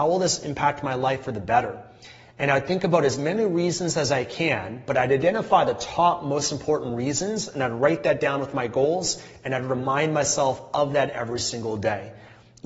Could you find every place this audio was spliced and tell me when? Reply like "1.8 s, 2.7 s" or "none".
none